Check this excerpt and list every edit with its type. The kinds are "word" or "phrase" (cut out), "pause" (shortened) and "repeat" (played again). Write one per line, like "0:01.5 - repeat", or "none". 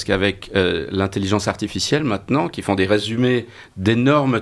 none